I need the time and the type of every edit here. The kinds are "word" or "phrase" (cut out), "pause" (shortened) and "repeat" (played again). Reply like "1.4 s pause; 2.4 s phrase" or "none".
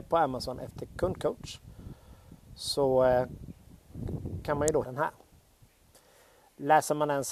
4.8 s word